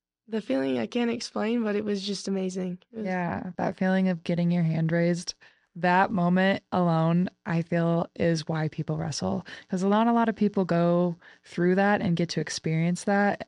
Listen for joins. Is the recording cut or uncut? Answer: uncut